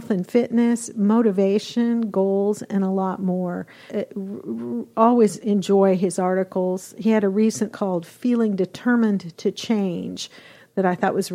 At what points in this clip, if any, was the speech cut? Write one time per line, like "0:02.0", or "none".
0:03.9
0:07.7